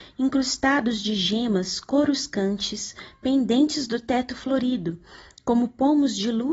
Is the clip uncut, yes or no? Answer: yes